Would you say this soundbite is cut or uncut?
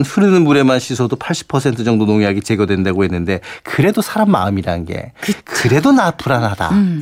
uncut